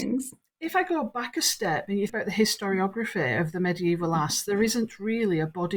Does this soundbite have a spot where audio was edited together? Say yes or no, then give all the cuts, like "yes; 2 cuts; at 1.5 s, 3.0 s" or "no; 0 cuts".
yes; 1 cut; at 2.1 s